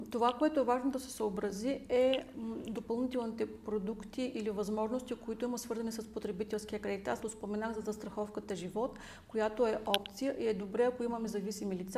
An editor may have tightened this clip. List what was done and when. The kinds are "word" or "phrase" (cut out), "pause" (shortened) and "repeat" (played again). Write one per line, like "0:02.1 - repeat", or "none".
0:07.2 - word